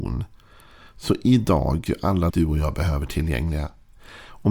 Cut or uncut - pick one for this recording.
cut